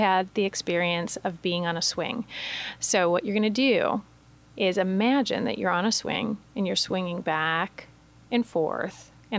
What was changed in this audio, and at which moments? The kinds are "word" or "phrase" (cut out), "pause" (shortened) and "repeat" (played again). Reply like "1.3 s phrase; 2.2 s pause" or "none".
none